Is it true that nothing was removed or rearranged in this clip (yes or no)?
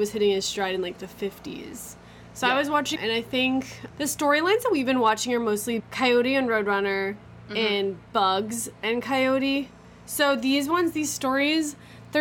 no